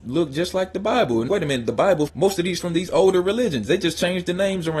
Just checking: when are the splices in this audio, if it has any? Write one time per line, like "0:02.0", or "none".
0:01.3
0:02.1
0:02.6